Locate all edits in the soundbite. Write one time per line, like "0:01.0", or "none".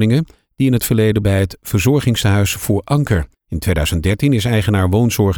0:01.2
0:03.3